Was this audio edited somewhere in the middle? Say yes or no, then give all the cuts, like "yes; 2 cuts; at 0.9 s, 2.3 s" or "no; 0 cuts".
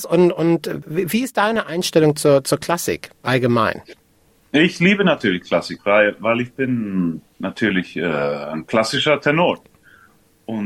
yes; 1 cut; at 3.1 s